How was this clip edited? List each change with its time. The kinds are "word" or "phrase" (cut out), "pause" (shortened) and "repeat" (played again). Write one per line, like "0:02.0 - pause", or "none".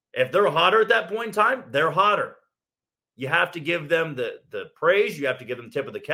none